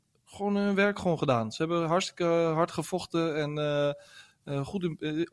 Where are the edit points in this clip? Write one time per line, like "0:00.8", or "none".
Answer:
none